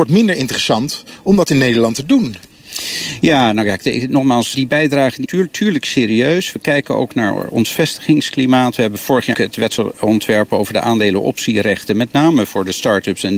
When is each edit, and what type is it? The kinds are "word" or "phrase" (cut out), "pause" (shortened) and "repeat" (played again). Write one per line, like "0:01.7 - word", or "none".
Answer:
0:04.5 - word
0:05.2 - word
0:09.3 - word